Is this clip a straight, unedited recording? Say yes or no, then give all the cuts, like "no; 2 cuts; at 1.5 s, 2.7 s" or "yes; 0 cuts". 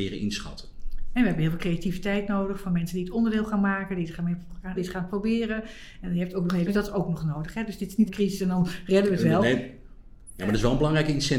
no; 3 cuts; at 4.8 s, 6.7 s, 8.1 s